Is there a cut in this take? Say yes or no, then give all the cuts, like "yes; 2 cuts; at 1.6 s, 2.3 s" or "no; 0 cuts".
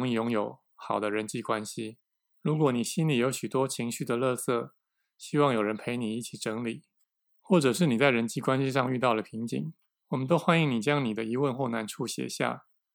no; 0 cuts